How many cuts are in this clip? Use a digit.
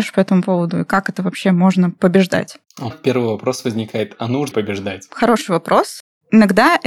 2